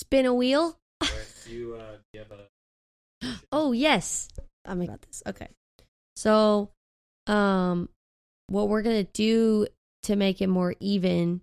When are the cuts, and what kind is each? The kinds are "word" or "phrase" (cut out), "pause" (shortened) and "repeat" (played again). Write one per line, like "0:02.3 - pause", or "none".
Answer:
0:01.4 - word
0:04.8 - word